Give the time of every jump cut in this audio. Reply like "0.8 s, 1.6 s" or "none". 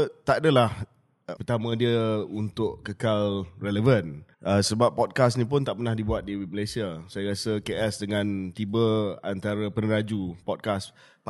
1.4 s, 4.3 s